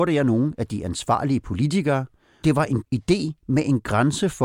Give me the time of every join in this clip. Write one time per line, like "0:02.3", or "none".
0:02.4
0:02.8